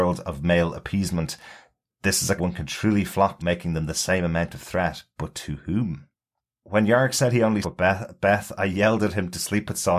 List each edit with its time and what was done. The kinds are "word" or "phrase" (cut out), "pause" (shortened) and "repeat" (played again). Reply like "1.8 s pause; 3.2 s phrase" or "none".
2.4 s word; 3.4 s word; 7.6 s word